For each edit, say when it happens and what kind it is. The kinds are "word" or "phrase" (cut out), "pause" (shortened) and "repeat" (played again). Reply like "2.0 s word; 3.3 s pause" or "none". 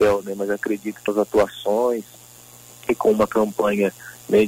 1.1 s word